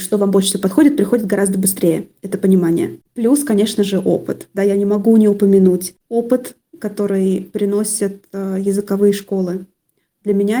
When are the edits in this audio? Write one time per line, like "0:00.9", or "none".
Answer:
none